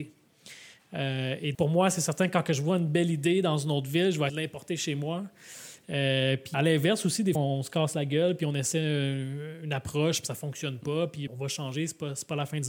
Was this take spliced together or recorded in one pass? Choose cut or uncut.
cut